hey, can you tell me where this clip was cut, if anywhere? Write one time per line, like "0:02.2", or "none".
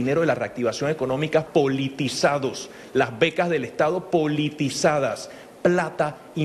0:01.5